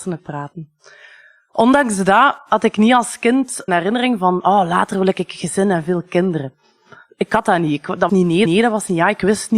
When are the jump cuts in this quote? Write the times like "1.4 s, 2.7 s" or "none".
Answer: 3.7 s, 8.1 s, 8.4 s